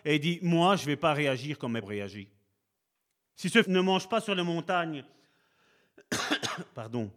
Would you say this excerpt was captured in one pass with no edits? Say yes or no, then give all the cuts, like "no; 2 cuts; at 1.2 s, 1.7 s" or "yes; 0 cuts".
no; 3 cuts; at 1.8 s, 2.8 s, 3.6 s